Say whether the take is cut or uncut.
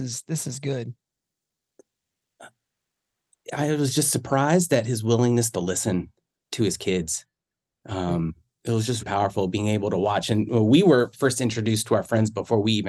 cut